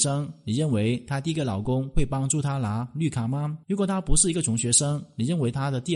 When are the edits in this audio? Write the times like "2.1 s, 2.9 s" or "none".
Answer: 3.6 s